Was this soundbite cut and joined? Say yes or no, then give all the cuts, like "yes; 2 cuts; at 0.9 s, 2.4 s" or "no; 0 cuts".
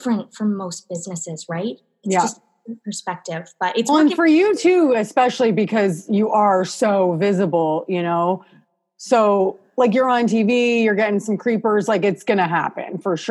no; 0 cuts